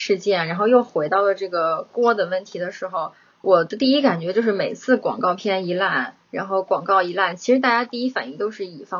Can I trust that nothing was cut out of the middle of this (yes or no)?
no